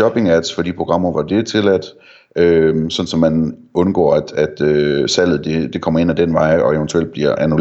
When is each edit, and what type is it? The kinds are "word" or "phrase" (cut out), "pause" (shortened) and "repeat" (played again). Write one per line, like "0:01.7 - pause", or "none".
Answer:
none